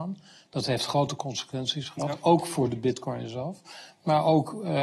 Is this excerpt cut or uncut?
uncut